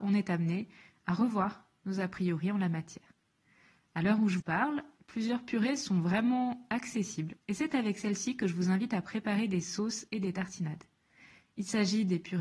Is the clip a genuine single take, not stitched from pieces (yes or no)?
no